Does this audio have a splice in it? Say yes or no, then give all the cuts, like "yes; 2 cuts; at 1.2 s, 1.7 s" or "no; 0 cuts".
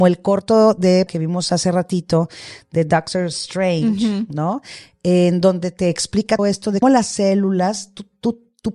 yes; 3 cuts; at 1.1 s, 6.4 s, 6.8 s